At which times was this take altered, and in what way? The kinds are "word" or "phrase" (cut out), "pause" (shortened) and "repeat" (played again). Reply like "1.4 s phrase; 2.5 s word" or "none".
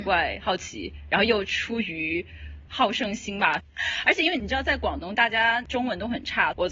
2.7 s pause